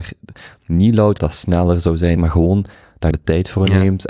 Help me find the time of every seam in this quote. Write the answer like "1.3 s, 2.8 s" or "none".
1.2 s, 2.2 s, 3.1 s